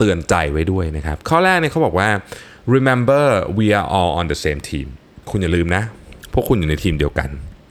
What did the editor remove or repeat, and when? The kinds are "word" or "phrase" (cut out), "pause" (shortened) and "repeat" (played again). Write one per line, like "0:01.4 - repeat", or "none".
0:05.2 - pause